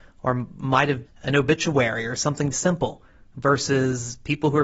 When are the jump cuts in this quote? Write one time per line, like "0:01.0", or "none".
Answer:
0:01.1
0:02.5